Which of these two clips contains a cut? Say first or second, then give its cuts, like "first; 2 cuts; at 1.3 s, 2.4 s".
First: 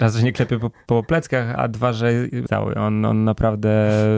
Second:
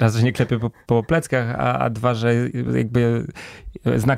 first; 2 cuts; at 1.6 s, 2.5 s